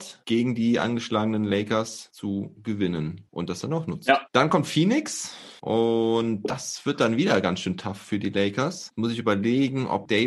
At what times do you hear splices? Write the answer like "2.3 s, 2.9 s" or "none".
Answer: none

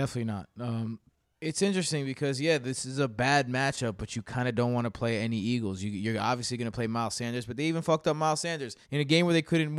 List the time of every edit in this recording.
1.1 s, 8.8 s

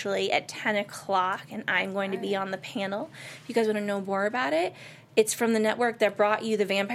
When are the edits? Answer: none

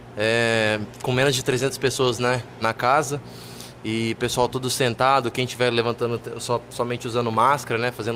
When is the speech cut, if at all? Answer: 2.6 s

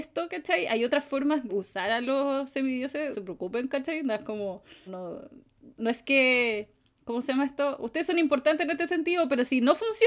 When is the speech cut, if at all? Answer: 1.5 s, 3.1 s, 4.9 s, 5.8 s

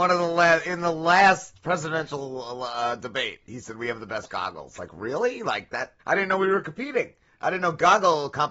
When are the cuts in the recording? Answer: 6.0 s

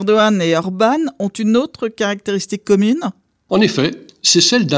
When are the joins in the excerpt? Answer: none

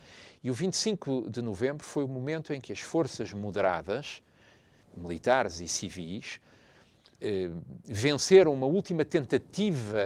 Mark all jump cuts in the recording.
none

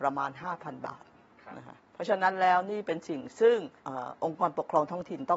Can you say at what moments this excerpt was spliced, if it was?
1.9 s, 3.8 s

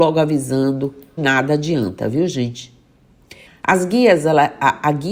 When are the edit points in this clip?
1.2 s, 3.5 s

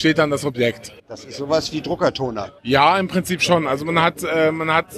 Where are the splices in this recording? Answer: 1.0 s, 2.6 s

